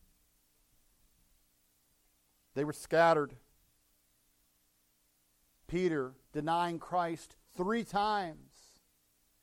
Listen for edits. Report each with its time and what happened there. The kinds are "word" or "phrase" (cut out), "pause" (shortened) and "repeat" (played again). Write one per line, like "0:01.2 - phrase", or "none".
0:06.2 - pause
0:07.5 - pause